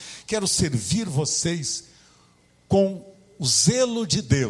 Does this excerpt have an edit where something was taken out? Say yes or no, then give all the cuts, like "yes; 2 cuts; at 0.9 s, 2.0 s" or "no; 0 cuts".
no; 0 cuts